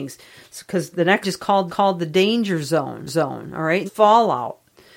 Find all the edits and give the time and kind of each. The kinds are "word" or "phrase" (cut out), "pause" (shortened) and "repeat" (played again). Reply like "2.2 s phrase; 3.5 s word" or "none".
0.9 s word; 1.2 s word; 1.7 s repeat; 3.1 s repeat; 3.9 s phrase